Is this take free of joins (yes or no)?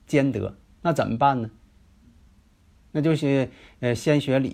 yes